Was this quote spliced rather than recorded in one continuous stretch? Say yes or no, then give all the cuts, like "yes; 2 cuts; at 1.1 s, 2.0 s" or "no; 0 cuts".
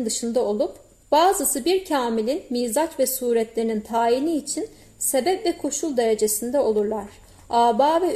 no; 0 cuts